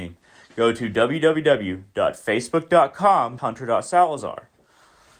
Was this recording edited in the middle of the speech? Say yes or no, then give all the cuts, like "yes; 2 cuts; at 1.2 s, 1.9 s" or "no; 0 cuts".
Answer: yes; 1 cut; at 3.4 s